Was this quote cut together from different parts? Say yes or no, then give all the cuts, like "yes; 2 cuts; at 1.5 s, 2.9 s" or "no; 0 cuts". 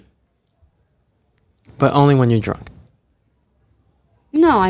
no; 0 cuts